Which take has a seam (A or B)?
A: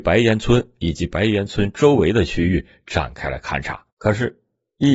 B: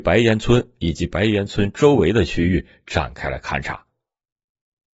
A